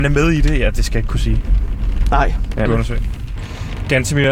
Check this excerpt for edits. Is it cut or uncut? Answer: cut